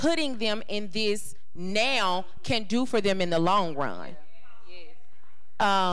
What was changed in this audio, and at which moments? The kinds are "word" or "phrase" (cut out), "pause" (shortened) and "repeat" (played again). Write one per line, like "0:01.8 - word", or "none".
none